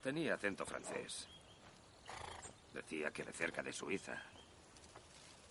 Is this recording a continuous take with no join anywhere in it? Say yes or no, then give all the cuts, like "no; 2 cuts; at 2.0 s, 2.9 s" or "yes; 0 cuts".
no; 1 cut; at 3.3 s